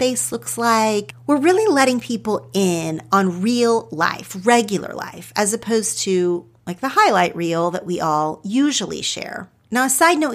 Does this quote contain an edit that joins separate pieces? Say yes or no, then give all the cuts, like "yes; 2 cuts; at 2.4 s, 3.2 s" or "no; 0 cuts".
no; 0 cuts